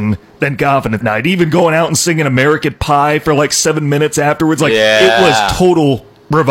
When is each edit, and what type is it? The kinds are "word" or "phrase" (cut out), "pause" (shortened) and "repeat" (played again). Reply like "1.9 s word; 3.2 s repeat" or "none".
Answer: 1.0 s word